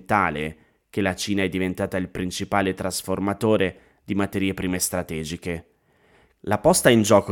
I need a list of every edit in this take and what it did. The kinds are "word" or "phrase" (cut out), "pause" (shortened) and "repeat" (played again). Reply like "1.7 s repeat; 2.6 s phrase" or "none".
none